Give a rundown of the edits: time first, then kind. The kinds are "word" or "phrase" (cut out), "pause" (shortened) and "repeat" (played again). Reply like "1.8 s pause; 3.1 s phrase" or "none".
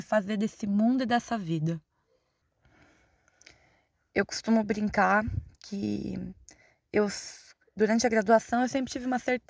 none